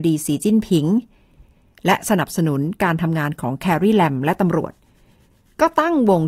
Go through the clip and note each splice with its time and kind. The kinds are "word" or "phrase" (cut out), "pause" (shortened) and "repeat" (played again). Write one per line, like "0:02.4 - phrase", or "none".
none